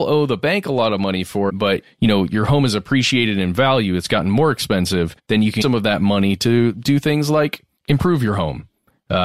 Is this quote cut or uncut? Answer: cut